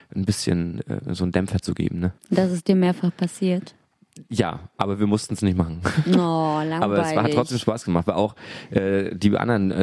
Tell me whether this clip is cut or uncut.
cut